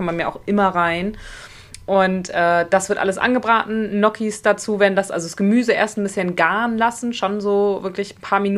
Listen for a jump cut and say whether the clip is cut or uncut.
uncut